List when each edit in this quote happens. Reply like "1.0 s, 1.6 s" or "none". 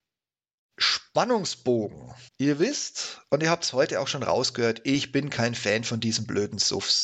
2.3 s